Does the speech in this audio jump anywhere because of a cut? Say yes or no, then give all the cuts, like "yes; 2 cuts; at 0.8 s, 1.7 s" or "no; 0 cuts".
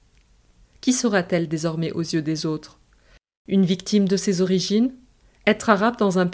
no; 0 cuts